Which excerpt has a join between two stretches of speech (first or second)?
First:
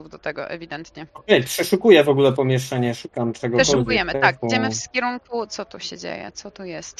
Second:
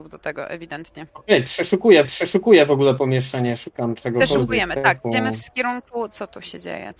second